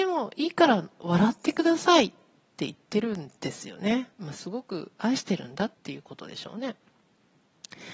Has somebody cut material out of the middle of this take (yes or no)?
yes